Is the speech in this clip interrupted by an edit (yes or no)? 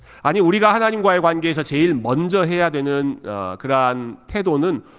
no